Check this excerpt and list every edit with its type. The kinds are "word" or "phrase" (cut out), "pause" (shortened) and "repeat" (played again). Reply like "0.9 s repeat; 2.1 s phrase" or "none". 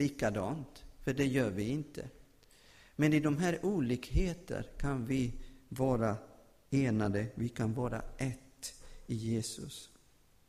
none